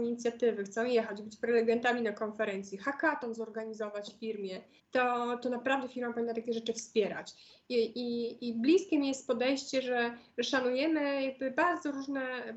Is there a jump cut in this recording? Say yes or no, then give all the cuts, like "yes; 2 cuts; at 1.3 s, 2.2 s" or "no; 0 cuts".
yes; 1 cut; at 4.8 s